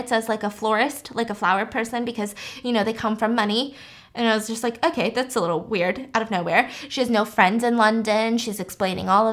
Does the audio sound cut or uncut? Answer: uncut